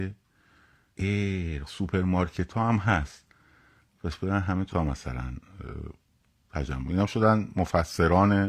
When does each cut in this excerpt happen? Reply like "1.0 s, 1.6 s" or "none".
0.9 s, 1.7 s, 4.7 s